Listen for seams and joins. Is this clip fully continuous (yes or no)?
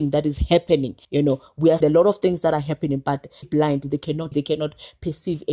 no